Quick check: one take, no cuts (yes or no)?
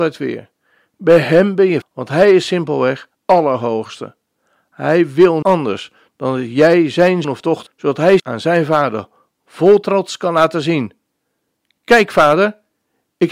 no